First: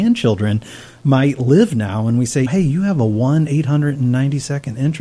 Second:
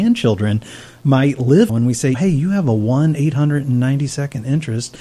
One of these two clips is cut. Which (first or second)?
second